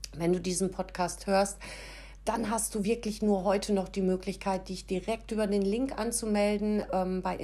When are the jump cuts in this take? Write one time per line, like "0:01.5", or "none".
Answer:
none